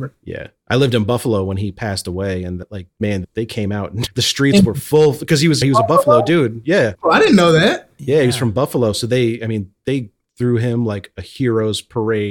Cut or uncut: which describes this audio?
uncut